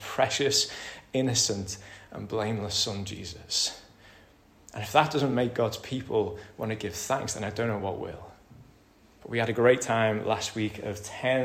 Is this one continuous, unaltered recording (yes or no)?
yes